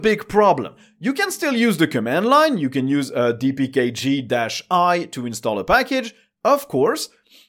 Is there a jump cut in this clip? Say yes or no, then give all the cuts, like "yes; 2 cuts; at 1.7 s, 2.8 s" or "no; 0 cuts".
no; 0 cuts